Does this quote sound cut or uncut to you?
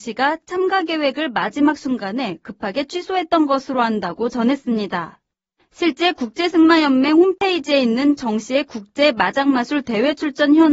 uncut